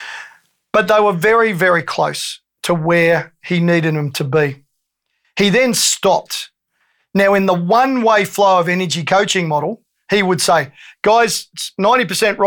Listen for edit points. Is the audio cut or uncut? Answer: uncut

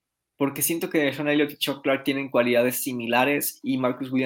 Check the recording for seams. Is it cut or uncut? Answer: uncut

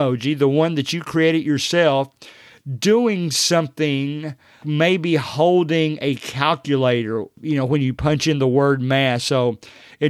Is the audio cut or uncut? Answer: cut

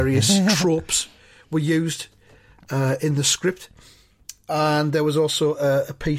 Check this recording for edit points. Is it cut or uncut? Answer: uncut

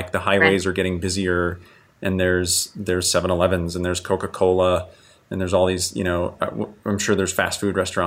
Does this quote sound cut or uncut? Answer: uncut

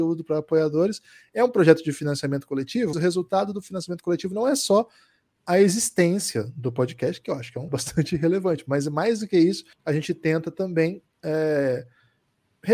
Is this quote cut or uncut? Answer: cut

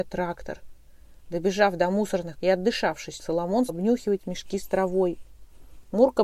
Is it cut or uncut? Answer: cut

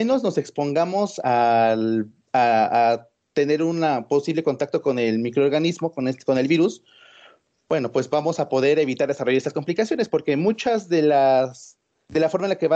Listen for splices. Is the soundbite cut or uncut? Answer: uncut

